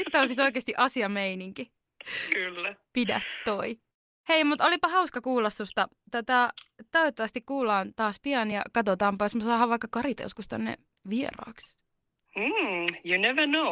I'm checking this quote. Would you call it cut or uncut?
uncut